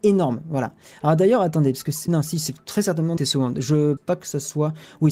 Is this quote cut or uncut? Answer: cut